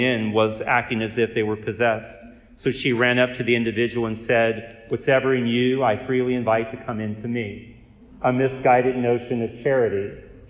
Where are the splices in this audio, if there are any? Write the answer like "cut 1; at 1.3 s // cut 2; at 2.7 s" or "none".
none